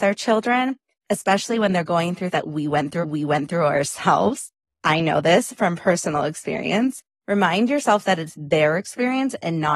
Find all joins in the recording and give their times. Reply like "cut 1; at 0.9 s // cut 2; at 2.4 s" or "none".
cut 1; at 2.3 s // cut 2; at 3.0 s